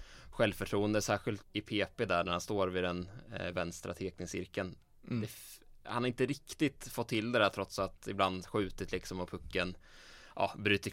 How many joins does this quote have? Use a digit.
1